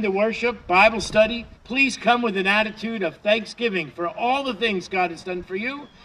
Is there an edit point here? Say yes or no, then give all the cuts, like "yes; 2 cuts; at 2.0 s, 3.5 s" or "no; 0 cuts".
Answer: yes; 1 cut; at 1.5 s